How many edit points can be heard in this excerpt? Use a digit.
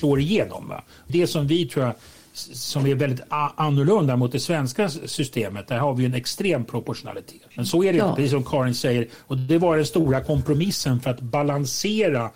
2